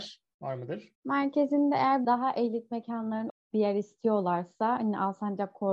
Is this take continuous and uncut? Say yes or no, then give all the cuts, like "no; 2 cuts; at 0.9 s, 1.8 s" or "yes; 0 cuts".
no; 3 cuts; at 0.9 s, 2.0 s, 3.3 s